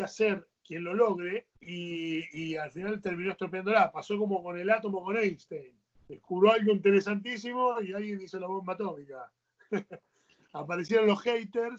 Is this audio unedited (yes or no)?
no